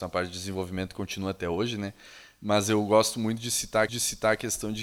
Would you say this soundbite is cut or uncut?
cut